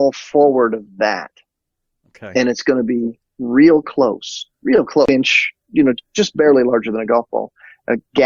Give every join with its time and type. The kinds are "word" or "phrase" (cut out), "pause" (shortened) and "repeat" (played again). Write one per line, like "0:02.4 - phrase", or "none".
0:04.5 - pause

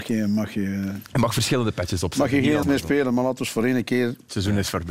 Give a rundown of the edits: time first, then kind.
0:02.6 - word

